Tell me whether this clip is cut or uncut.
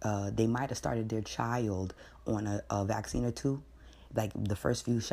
uncut